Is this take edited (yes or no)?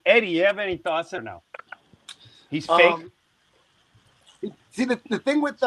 yes